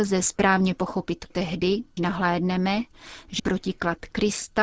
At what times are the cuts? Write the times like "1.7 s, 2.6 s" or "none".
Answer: 1.3 s, 2.0 s, 3.4 s